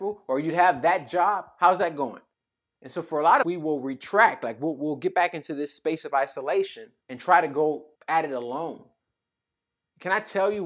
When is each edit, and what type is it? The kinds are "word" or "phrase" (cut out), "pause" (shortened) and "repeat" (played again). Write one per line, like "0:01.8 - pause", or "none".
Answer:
0:02.3 - pause
0:03.4 - phrase
0:07.0 - pause
0:07.9 - pause